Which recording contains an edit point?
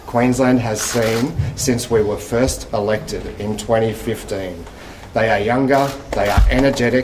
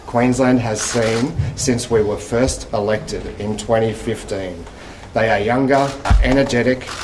second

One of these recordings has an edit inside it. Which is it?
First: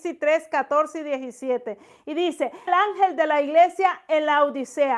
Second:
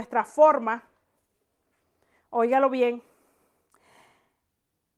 first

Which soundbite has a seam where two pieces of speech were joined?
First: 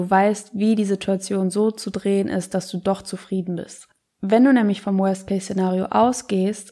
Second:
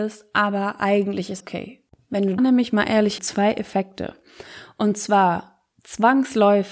second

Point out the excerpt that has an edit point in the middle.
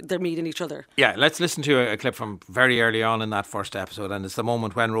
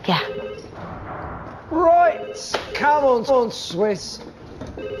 second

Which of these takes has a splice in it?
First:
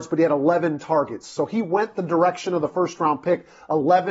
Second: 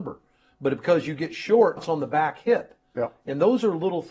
second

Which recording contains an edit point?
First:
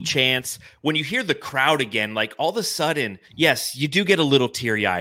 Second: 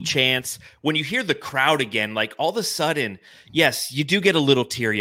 first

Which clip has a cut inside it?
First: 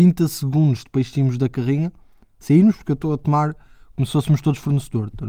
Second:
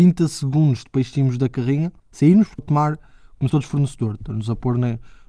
second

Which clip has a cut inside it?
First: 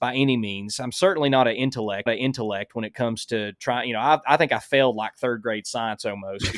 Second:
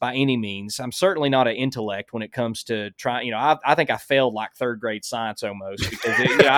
first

